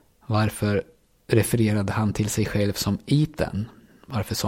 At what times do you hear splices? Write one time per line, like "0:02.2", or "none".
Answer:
none